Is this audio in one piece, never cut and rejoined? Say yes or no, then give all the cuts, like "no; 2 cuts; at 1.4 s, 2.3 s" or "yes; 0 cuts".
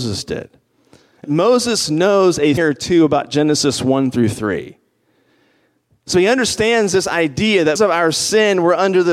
no; 3 cuts; at 1.2 s, 2.6 s, 7.8 s